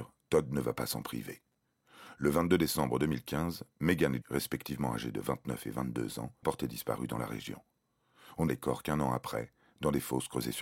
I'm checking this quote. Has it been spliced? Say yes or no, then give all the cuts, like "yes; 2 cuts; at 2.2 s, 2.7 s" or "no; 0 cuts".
yes; 3 cuts; at 4.2 s, 6.4 s, 8.5 s